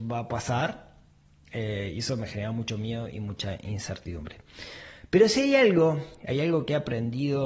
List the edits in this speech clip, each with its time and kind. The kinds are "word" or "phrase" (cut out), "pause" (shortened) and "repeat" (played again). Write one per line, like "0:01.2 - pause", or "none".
none